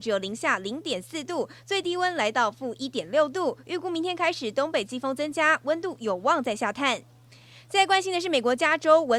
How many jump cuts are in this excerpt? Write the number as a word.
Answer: zero